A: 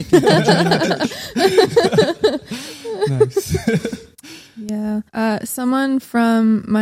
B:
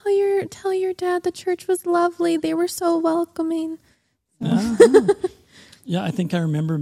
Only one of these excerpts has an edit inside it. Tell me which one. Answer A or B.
A